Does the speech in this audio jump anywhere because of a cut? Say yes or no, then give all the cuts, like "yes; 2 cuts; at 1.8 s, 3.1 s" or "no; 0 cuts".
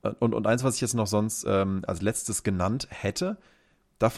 no; 0 cuts